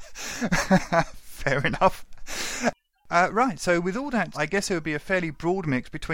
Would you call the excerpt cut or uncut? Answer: cut